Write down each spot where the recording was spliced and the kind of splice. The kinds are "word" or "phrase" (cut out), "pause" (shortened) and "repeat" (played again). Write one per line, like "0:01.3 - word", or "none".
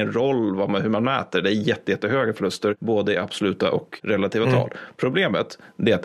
none